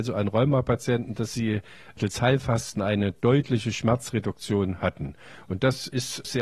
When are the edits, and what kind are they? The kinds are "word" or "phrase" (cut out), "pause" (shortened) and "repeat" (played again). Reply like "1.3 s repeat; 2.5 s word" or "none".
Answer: none

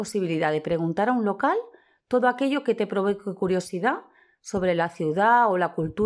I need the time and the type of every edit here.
none

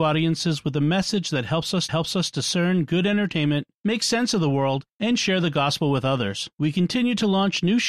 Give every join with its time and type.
1.9 s repeat

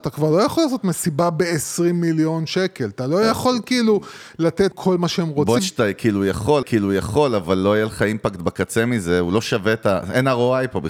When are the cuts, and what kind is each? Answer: 4.7 s word; 5.6 s word; 6.6 s repeat

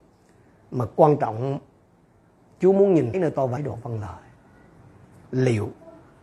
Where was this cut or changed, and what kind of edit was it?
3.1 s word; 3.6 s phrase

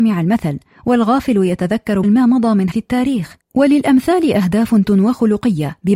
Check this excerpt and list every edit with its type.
2.0 s word; 2.7 s word; 3.4 s word; 4.8 s word

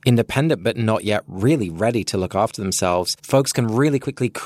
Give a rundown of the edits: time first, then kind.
3.2 s pause

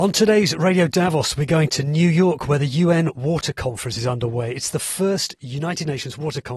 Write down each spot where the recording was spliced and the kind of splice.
none

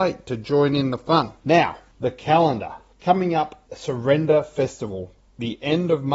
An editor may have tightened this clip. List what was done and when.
1.4 s pause; 3.7 s word

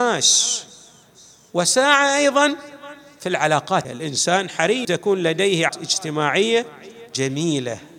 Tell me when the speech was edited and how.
3.8 s word; 4.8 s phrase; 5.7 s word

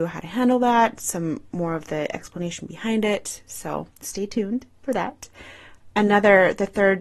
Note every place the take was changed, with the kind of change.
3.9 s pause

